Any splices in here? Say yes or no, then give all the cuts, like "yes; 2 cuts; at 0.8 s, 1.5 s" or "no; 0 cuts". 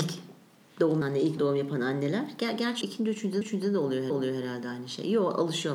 yes; 5 cuts; at 1.0 s, 1.4 s, 2.8 s, 3.4 s, 4.1 s